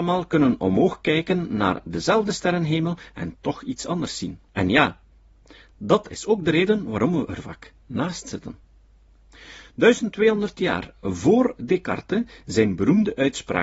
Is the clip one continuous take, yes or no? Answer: no